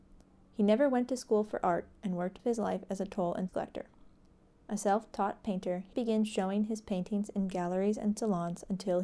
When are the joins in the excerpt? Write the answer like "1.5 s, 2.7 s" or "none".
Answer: 2.4 s, 3.5 s, 5.9 s